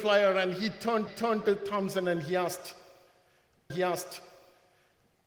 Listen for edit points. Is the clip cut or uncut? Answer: cut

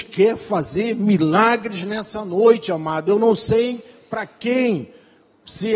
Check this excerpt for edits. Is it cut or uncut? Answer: uncut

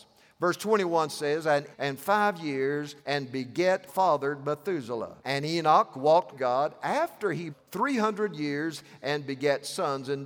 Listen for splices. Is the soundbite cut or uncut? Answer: cut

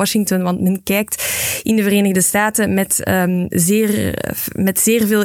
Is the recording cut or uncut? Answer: uncut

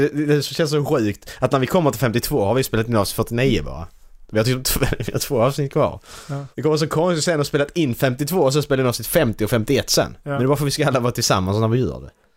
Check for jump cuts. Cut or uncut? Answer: cut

